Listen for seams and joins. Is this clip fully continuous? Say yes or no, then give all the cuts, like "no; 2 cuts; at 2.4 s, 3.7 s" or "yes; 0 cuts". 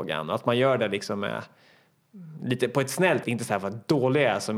no; 1 cut; at 3.2 s